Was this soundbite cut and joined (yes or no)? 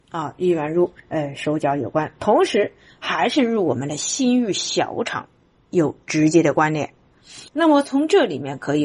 yes